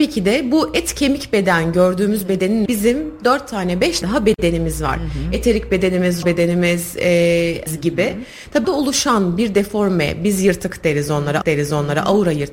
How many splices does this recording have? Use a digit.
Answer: 6